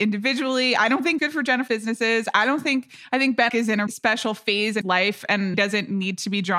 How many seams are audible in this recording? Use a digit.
6